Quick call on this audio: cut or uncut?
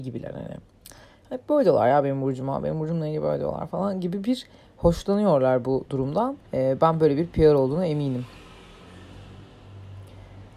cut